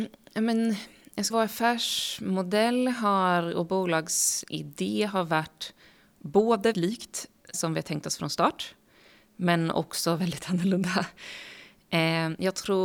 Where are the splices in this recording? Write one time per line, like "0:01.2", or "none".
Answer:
0:01.3
0:06.7
0:07.5